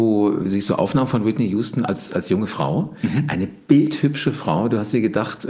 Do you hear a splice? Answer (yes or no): no